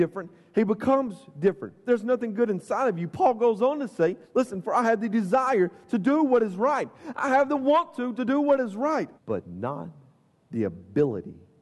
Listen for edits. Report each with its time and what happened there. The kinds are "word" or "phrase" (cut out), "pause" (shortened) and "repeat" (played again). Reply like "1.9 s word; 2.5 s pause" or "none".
4.2 s pause; 9.2 s pause